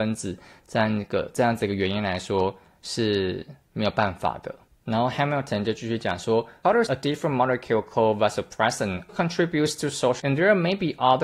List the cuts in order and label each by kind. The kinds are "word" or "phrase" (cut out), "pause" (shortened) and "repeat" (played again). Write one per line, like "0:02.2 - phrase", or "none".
0:06.9 - word
0:09.1 - word
0:10.2 - word

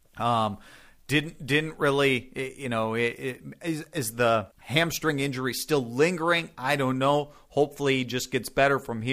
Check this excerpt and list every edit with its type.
0:04.5 - pause

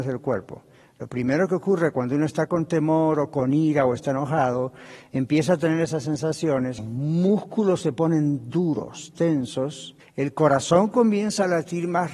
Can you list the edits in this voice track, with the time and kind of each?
0:06.8 - word
0:10.0 - pause

